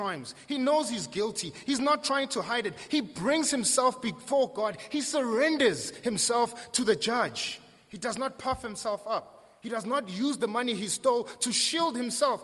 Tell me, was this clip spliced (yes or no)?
no